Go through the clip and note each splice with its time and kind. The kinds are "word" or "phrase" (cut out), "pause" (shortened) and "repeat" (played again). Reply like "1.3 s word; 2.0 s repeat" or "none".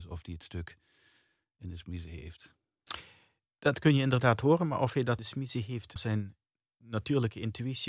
5.2 s word; 6.0 s word